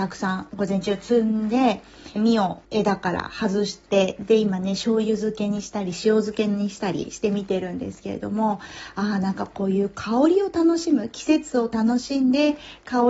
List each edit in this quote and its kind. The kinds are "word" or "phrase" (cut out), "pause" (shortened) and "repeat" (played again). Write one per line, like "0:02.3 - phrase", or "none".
0:02.2 - word
0:02.6 - phrase